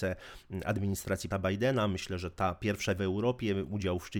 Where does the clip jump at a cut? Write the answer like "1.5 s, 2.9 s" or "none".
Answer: 1.3 s, 3.0 s